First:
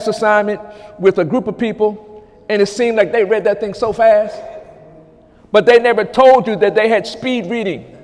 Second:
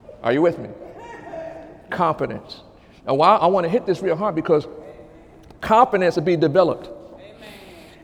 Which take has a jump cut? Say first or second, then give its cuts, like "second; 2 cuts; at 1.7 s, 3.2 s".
second; 2 cuts; at 3.4 s, 6.1 s